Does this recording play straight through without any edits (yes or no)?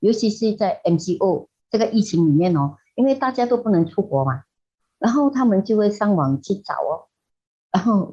yes